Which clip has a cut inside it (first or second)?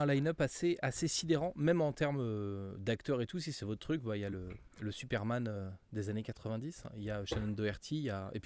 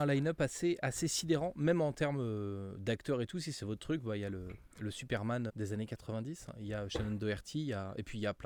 second